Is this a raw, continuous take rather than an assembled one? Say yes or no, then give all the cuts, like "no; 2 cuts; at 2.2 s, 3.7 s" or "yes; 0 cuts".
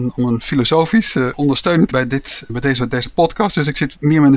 no; 3 cuts; at 1.3 s, 1.9 s, 2.5 s